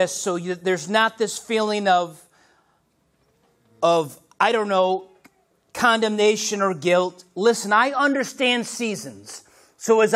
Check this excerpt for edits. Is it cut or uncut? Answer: uncut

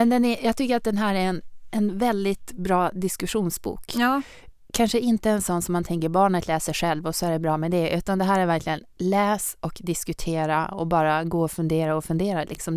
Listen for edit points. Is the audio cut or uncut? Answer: uncut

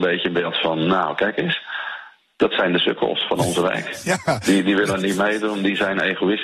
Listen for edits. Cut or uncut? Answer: uncut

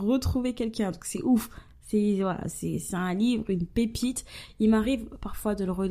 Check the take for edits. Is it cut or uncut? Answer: uncut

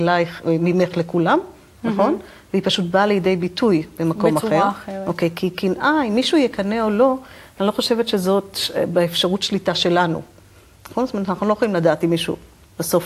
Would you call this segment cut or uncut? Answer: uncut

